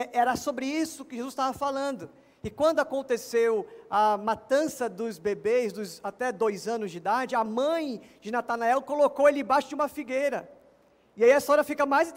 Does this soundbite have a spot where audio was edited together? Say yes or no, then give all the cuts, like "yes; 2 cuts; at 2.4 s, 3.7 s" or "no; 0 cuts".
no; 0 cuts